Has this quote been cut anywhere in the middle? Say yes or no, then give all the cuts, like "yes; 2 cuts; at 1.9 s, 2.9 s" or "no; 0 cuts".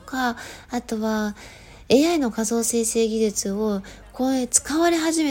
no; 0 cuts